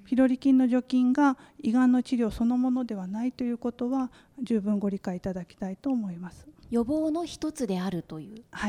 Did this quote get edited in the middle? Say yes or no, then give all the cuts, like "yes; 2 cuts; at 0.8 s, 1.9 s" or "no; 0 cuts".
no; 0 cuts